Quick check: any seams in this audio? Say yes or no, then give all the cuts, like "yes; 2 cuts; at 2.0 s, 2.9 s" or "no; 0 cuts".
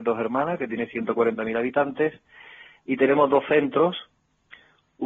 no; 0 cuts